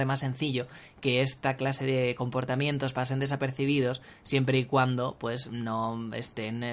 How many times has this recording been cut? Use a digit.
0